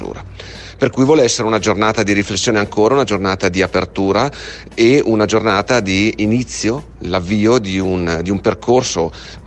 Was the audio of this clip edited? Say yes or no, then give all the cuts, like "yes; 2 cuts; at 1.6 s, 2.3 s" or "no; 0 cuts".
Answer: no; 0 cuts